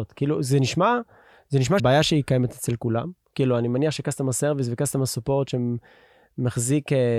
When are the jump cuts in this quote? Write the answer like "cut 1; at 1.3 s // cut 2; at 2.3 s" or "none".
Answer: cut 1; at 1.8 s